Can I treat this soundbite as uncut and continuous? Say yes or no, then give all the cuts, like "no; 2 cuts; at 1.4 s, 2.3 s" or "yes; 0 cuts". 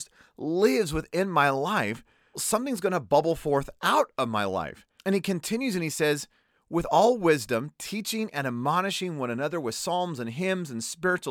no; 2 cuts; at 2.3 s, 5.0 s